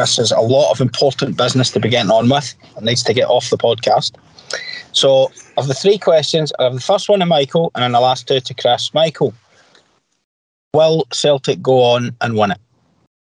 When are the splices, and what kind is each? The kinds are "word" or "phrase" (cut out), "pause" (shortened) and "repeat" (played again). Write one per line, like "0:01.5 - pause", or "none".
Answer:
none